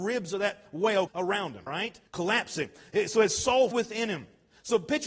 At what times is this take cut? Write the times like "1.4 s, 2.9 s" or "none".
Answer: 1.1 s, 1.7 s, 2.1 s, 3.7 s